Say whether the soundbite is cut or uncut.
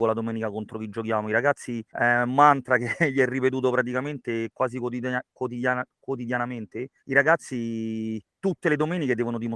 cut